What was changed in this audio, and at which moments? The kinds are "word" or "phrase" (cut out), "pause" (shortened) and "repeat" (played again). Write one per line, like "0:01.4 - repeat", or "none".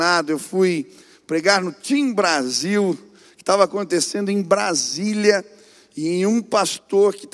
none